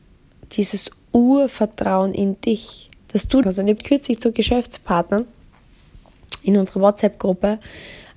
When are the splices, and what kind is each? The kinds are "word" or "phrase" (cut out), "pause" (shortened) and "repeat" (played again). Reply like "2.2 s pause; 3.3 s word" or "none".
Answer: 3.0 s pause; 3.4 s phrase; 3.8 s word